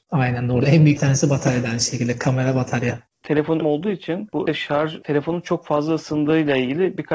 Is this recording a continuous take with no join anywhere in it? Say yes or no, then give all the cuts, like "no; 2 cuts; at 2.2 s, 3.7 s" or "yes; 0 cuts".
no; 4 cuts; at 1.0 s, 3.6 s, 4.5 s, 5.0 s